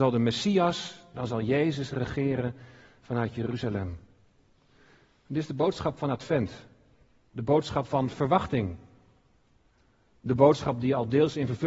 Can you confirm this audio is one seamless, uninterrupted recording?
yes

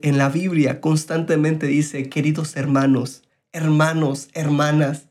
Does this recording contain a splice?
no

